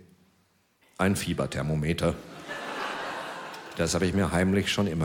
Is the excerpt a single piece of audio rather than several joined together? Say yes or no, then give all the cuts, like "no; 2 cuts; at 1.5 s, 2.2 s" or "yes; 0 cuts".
yes; 0 cuts